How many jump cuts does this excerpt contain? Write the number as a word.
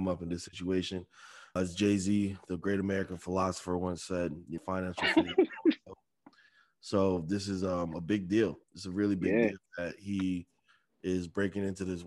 four